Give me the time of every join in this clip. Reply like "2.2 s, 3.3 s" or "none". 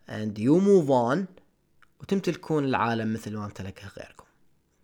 none